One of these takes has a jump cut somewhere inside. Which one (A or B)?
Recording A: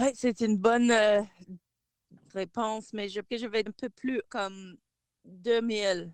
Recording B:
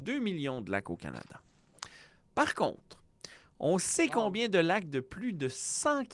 A